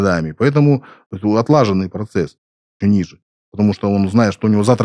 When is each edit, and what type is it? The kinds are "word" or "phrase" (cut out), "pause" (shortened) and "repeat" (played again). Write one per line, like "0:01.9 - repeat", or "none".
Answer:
0:02.8 - phrase